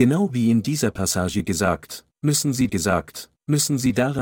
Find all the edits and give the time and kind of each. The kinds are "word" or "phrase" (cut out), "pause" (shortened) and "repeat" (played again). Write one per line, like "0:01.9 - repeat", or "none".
0:02.7 - repeat